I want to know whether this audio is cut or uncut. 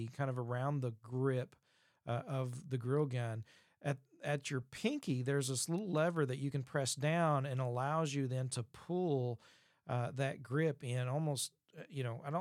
uncut